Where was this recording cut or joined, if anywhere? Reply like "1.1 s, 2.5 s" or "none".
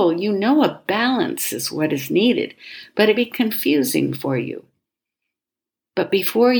3.2 s